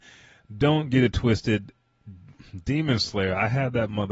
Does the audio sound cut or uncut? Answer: uncut